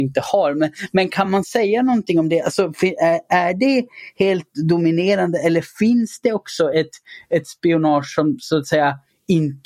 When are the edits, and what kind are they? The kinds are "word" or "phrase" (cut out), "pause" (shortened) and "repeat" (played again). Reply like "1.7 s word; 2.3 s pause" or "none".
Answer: none

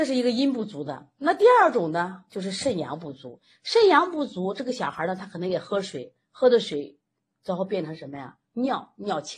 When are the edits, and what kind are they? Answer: none

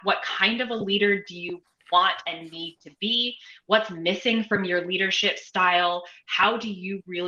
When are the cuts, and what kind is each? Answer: none

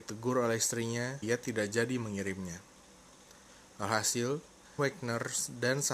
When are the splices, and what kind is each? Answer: 1.2 s word; 4.8 s word

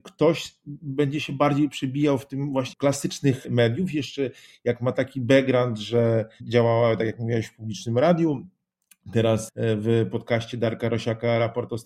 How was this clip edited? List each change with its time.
2.7 s word; 9.5 s word

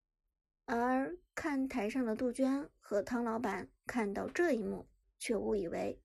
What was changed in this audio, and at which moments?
5.0 s pause

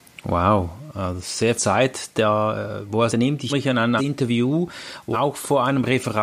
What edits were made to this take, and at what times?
1.6 s word; 3.1 s word; 3.5 s word; 4.0 s word; 5.1 s phrase

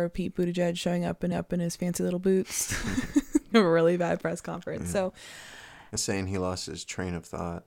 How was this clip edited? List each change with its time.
1.3 s repeat; 3.5 s word; 6.0 s word

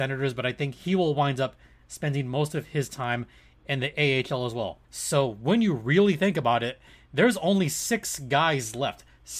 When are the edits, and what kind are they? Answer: 4.8 s pause

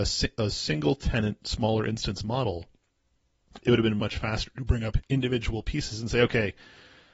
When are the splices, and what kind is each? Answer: 4.0 s word

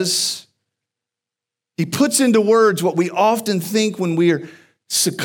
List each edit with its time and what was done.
none

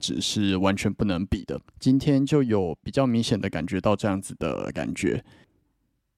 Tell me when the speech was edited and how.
1.7 s pause

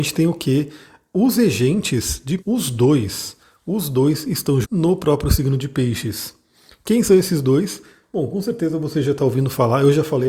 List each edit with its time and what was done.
2.4 s word; 4.6 s word

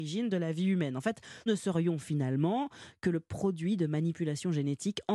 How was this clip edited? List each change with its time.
1.5 s word

